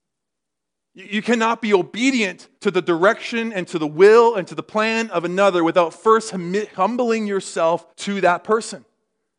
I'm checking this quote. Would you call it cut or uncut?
cut